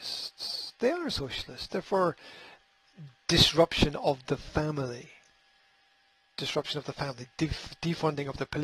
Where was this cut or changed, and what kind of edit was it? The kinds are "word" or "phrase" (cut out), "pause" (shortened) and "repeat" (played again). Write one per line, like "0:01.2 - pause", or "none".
none